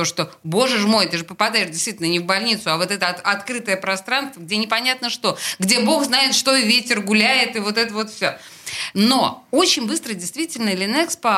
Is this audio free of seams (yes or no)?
yes